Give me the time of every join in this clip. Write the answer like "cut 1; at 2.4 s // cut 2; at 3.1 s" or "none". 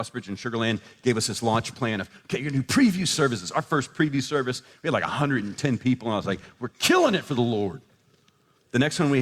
none